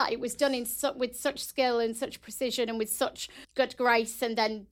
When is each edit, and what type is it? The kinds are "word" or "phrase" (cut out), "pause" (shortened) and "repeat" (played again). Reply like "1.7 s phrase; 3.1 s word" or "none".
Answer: 3.4 s pause